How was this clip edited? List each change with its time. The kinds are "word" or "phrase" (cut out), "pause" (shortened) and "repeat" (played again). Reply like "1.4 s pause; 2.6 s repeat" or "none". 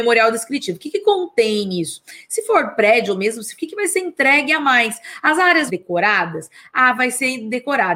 3.6 s phrase; 5.7 s phrase